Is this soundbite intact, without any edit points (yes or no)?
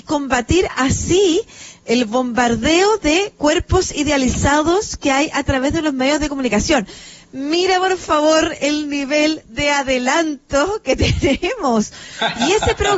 yes